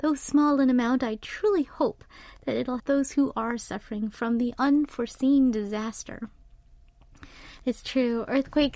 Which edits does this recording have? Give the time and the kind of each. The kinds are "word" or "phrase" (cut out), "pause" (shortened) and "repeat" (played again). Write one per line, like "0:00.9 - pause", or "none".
0:02.8 - word